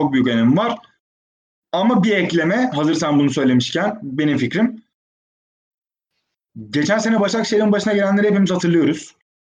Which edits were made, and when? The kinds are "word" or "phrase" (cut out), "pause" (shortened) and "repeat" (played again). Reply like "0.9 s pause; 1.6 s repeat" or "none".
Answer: none